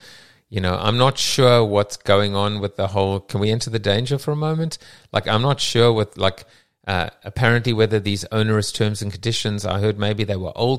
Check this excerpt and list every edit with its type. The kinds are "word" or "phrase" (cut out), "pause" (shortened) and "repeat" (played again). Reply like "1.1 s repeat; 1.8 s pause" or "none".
none